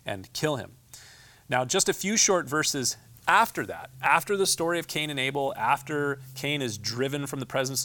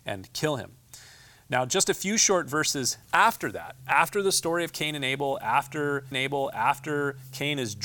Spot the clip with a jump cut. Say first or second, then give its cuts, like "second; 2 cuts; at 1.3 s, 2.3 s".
second; 2 cuts; at 3.0 s, 6.1 s